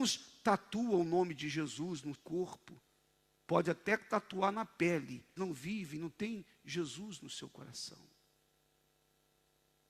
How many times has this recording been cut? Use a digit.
2